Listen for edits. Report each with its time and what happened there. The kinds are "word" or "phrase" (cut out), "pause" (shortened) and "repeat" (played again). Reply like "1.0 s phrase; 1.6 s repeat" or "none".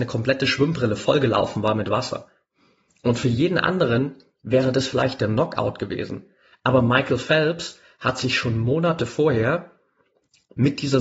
none